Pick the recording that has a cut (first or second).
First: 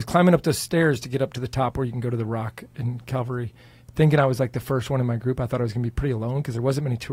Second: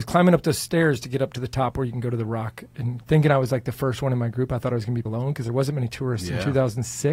second